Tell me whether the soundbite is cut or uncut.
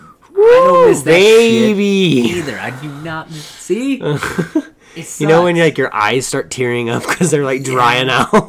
uncut